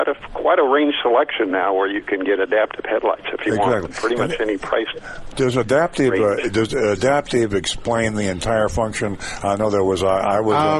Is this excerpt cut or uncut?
uncut